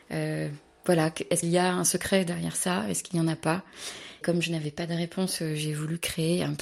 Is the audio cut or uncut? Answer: cut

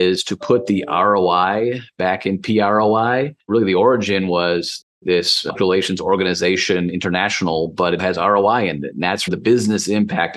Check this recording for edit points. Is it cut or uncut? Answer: cut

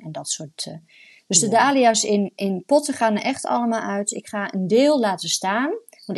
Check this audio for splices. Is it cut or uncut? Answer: uncut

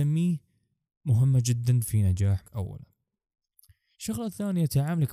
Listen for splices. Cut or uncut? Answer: cut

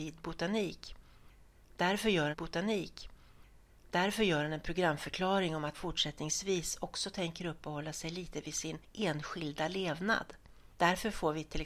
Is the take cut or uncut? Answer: cut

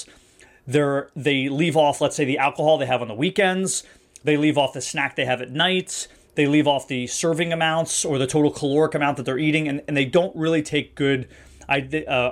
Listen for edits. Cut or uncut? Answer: uncut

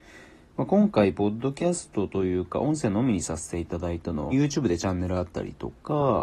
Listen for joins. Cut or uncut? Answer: cut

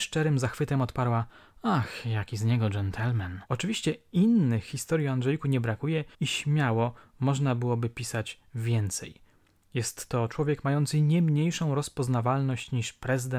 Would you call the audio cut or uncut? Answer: cut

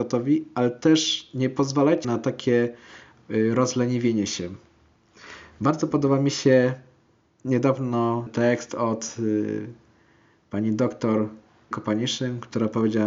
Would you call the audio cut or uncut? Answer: cut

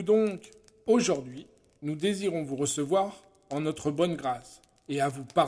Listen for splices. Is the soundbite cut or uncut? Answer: uncut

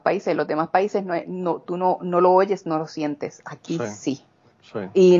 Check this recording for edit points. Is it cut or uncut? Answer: uncut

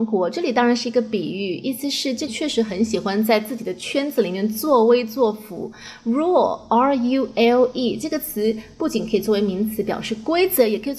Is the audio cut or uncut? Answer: cut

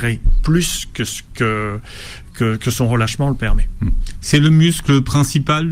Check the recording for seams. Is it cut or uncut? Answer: uncut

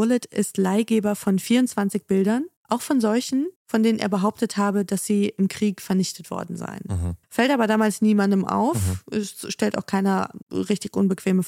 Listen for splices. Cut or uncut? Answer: cut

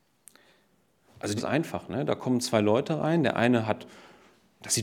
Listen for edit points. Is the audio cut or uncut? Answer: cut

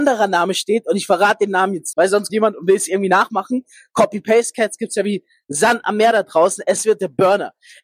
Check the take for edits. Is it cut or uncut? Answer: cut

